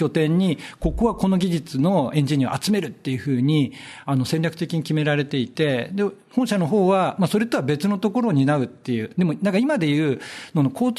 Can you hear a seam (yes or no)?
no